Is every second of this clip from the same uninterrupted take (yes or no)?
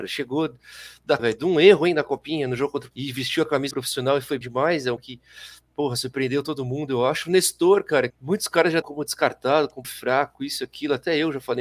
no